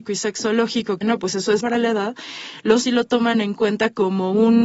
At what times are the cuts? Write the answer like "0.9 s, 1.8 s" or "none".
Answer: 1.0 s, 1.6 s, 2.8 s